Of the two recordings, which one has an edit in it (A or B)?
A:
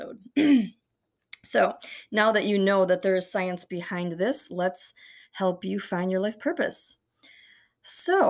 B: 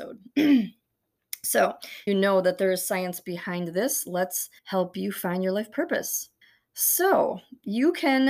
B